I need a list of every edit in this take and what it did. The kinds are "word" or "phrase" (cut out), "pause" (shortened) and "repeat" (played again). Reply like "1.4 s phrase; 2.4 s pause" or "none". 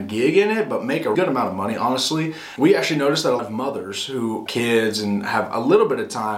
1.1 s word; 2.6 s word; 3.4 s word; 4.5 s word